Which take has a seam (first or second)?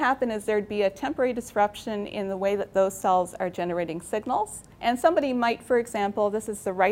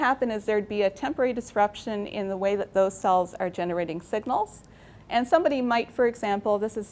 first